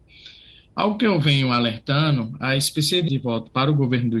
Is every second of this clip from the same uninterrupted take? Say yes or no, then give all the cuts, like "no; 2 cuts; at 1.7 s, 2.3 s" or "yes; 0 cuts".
no; 1 cut; at 3.1 s